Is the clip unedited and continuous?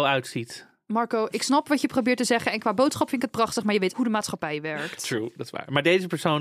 no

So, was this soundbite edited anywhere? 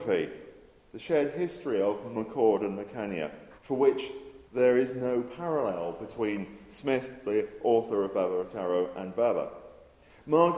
yes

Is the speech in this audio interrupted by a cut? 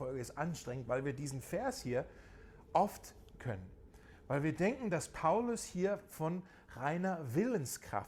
yes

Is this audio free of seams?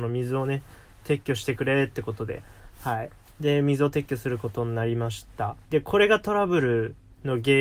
no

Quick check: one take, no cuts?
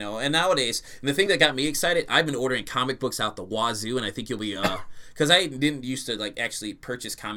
yes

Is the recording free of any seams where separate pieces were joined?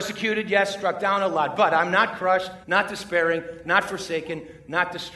no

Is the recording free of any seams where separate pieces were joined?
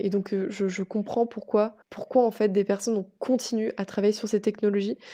no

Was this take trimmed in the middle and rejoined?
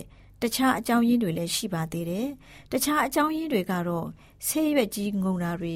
no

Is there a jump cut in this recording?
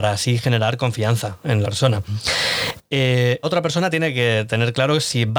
yes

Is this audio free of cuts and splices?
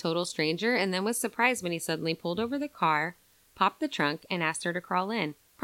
yes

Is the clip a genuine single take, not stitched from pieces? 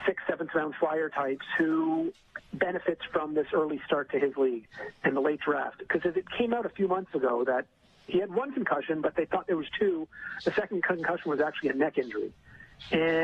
yes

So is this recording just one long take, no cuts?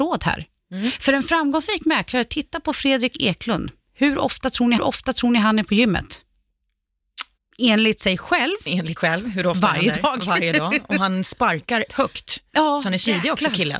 no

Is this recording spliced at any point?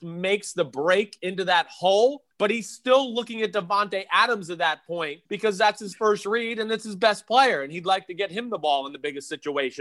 yes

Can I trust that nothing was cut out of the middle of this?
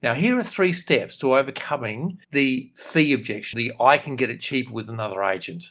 no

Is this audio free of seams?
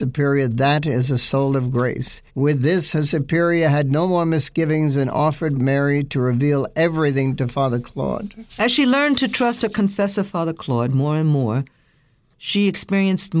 no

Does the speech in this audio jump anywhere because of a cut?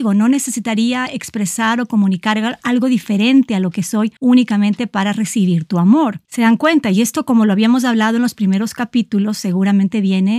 yes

